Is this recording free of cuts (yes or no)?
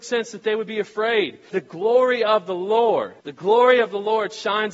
no